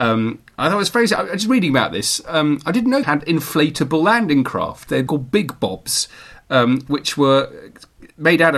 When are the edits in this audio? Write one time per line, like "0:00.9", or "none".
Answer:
0:03.0
0:05.1